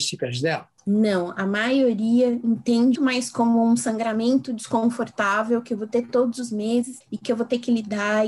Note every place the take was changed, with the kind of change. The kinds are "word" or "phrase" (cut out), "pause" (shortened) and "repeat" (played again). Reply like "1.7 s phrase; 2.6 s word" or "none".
3.0 s word; 7.0 s pause